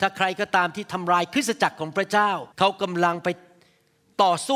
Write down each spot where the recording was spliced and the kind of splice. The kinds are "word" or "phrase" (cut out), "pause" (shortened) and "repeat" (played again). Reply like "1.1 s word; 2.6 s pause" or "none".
2.5 s pause